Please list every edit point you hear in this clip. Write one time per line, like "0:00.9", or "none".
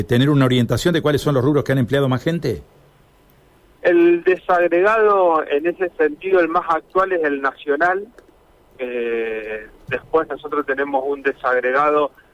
none